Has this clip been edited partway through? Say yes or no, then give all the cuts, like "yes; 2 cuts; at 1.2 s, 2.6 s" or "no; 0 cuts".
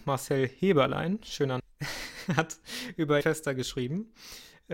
yes; 2 cuts; at 1.6 s, 3.2 s